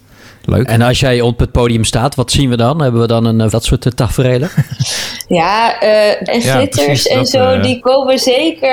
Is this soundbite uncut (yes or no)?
no